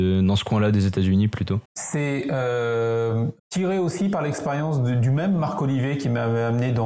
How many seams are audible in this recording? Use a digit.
2